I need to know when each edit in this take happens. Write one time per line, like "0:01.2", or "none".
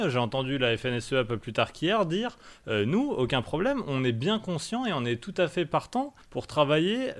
0:06.2